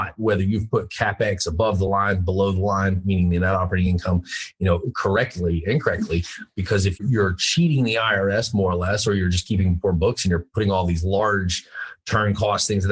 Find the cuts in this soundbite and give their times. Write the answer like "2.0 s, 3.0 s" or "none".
none

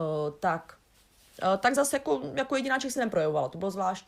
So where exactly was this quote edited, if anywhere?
none

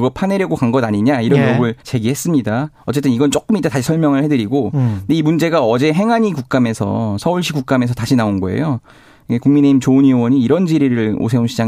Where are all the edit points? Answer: 1.8 s

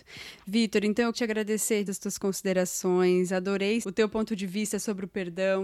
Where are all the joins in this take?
1.1 s, 1.9 s, 3.8 s

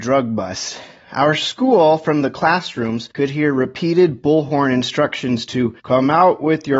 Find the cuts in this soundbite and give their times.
3.1 s, 5.8 s

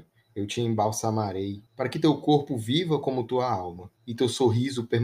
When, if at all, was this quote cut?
1.7 s, 4.0 s

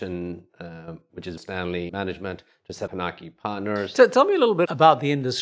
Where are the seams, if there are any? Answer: 1.4 s, 1.9 s, 2.9 s

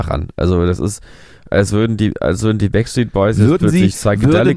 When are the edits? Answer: none

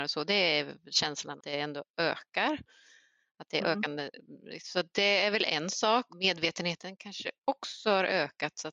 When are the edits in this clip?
1.4 s, 6.1 s

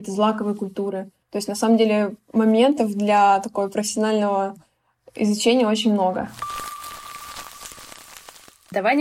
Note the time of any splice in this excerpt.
1.2 s

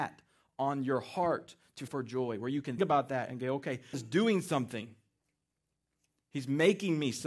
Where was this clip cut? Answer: 1.9 s, 2.8 s, 3.9 s

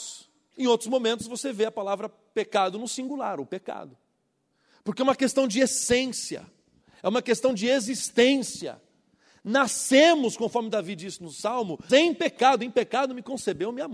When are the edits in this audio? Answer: 11.9 s

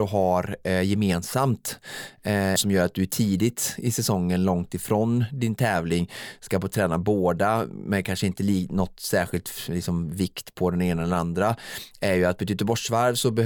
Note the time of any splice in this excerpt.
2.6 s

